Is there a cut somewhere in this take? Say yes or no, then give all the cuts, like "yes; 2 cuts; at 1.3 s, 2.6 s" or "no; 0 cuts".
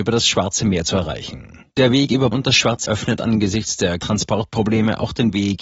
yes; 4 cuts; at 1.7 s, 2.3 s, 2.9 s, 4.0 s